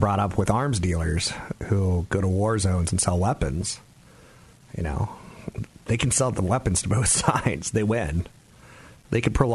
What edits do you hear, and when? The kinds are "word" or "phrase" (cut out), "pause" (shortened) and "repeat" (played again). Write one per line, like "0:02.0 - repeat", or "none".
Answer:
none